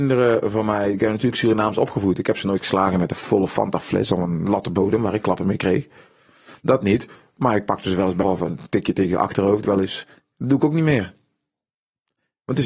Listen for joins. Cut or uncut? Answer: cut